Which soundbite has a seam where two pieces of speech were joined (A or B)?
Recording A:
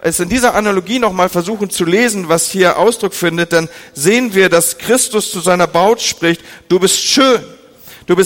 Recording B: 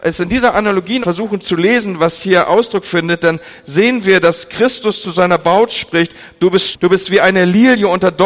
B